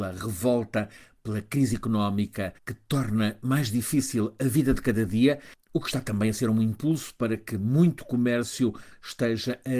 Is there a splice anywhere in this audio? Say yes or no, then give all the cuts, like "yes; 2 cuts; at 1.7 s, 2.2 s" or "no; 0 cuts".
yes; 1 cut; at 2.6 s